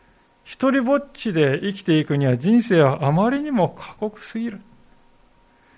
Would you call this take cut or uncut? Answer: uncut